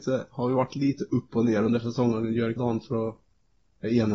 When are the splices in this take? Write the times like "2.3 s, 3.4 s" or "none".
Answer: 2.6 s

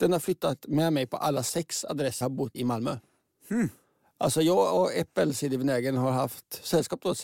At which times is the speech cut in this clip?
2.2 s, 2.5 s

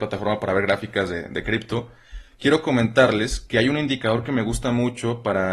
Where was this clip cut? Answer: none

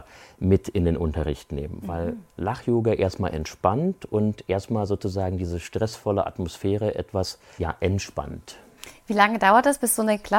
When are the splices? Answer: 7.6 s

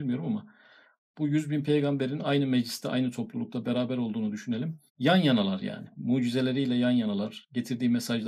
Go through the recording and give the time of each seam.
4.9 s

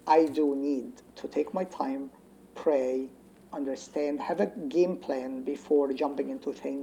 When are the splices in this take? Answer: none

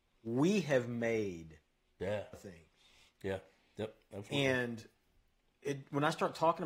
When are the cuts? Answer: 2.3 s

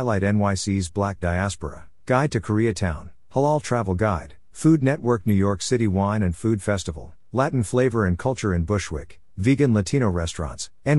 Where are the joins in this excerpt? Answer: 1.2 s

